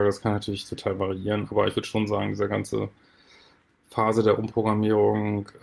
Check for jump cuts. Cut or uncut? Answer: uncut